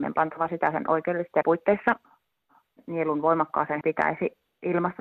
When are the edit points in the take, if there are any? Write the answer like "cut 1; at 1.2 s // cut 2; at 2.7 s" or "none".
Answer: cut 1; at 1.4 s // cut 2; at 3.8 s